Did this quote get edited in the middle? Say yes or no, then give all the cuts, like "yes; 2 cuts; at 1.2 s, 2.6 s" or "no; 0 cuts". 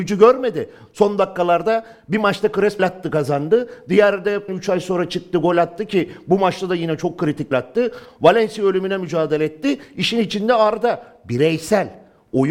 yes; 3 cuts; at 2.8 s, 4.5 s, 7.5 s